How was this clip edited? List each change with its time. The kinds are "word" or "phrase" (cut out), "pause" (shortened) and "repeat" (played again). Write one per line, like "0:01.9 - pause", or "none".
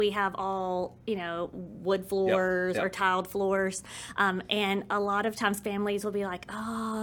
none